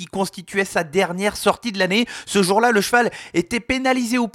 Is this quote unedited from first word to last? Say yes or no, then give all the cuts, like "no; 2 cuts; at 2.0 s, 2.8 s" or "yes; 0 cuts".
yes; 0 cuts